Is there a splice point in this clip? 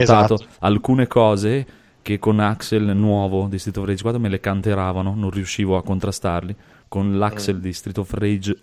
no; 0 cuts

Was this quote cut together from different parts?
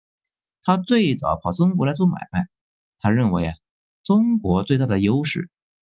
no; 0 cuts

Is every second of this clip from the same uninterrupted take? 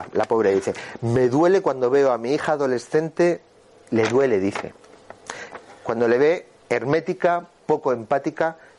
yes; 0 cuts

